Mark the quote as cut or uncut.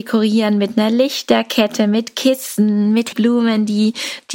cut